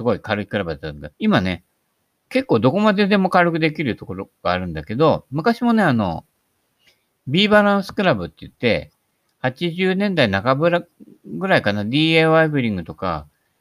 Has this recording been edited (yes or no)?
yes